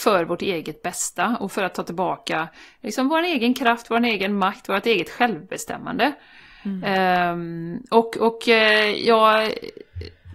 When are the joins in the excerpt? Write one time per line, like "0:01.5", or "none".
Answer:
none